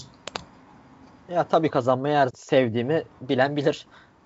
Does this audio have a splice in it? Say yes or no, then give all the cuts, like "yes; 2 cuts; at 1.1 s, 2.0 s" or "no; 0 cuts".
yes; 2 cuts; at 1.7 s, 2.3 s